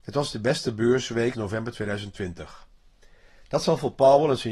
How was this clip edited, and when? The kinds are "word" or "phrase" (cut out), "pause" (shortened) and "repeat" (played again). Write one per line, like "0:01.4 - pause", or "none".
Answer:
0:01.3 - word